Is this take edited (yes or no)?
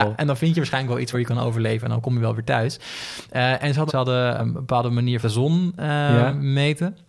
yes